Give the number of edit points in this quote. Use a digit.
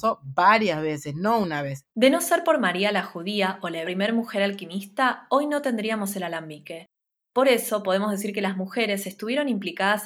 2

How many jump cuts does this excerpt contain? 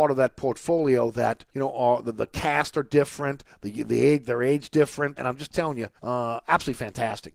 3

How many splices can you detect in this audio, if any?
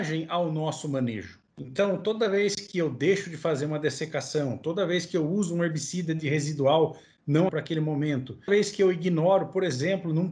3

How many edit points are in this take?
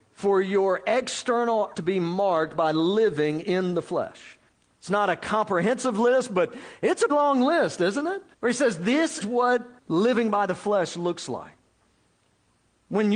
6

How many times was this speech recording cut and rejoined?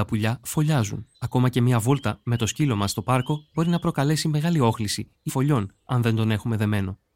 2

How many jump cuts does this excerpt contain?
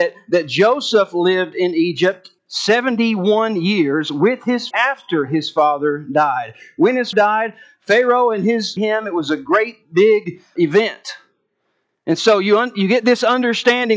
5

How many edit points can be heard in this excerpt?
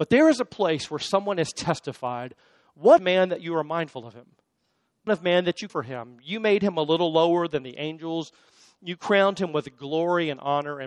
3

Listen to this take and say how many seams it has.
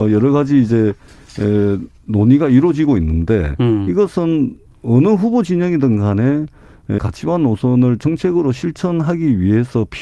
1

